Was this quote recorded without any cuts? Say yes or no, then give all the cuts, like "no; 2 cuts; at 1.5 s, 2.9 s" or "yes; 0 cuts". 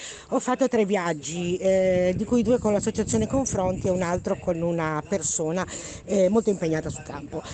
yes; 0 cuts